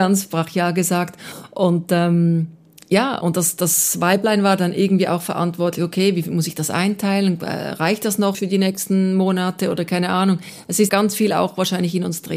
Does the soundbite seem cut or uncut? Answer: cut